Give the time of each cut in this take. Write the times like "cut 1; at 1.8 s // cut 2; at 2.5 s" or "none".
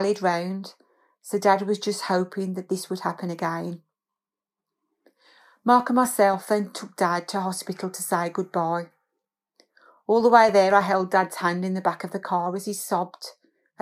none